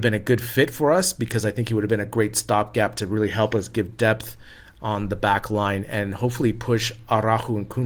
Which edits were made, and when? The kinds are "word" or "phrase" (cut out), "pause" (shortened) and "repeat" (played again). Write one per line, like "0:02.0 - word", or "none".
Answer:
none